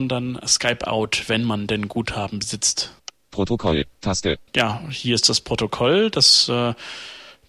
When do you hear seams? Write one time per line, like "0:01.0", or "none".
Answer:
0:04.5